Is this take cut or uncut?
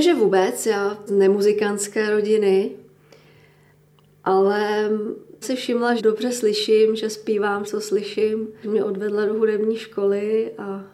cut